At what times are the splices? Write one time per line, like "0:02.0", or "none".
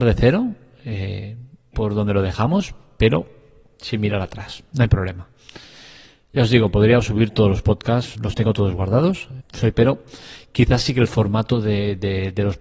0:01.7
0:08.1
0:09.4
0:09.7